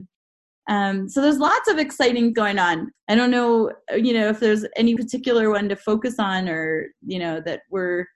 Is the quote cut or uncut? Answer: cut